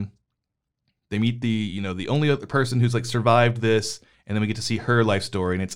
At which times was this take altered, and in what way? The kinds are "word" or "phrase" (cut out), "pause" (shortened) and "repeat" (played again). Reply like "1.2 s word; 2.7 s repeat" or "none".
none

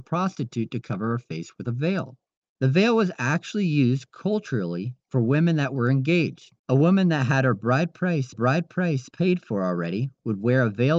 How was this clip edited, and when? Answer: 2.3 s pause; 6.6 s pause; 8.3 s repeat

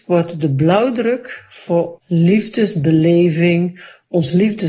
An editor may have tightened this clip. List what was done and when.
2.0 s word

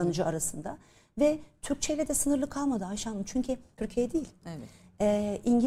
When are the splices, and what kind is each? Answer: 3.8 s phrase

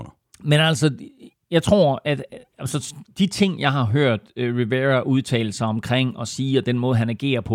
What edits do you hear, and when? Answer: 1.3 s pause; 3.1 s pause

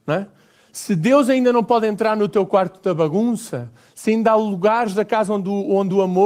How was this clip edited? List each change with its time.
none

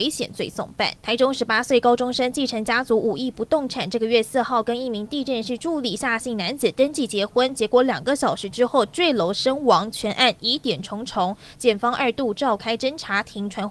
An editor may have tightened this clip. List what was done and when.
1.0 s pause

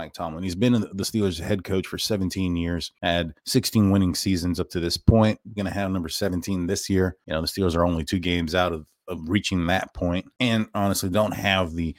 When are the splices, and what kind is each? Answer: 3.4 s pause; 5.6 s word

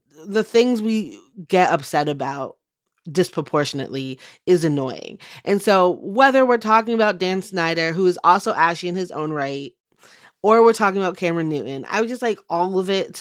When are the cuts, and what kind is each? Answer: none

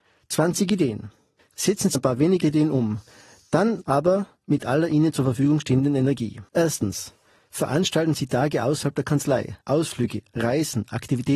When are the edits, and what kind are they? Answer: 1.4 s pause; 1.9 s word; 2.4 s word; 6.5 s pause; 9.6 s pause

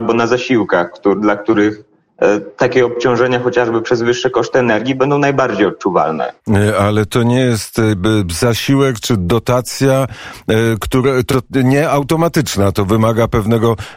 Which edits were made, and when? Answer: 6.4 s pause; 11.3 s word

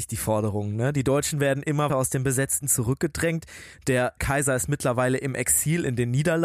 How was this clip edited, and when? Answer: 1.9 s word; 2.6 s word; 4.2 s word

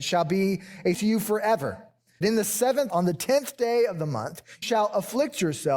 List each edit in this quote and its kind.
0.9 s word; 2.2 s word; 2.9 s word; 4.6 s word

